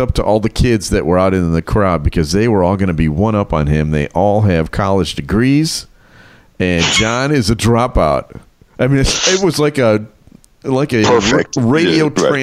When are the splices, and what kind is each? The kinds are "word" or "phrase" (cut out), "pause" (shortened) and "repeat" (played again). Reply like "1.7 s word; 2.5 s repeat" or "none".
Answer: none

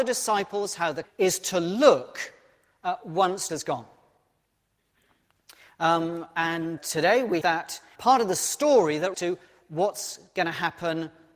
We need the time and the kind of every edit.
1.0 s word; 3.5 s word; 6.8 s word; 7.4 s word; 8.0 s word; 9.1 s word

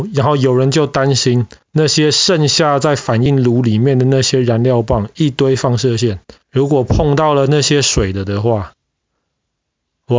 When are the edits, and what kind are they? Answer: 1.6 s pause; 6.4 s pause

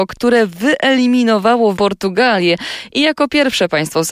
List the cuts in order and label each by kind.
1.8 s word

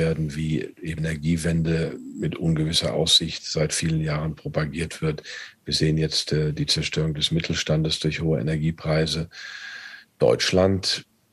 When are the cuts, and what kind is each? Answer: 1.0 s word

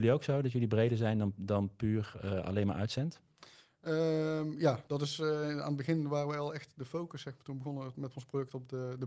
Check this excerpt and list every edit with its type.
none

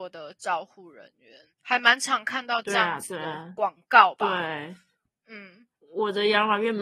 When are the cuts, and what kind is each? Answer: 1.5 s pause; 5.7 s pause

